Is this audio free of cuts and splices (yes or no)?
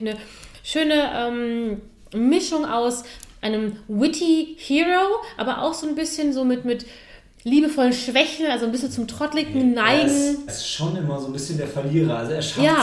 no